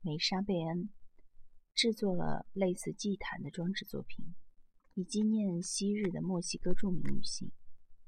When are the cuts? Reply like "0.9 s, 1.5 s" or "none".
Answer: 1.7 s, 4.8 s